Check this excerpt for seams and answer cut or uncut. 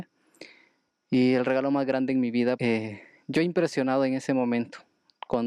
cut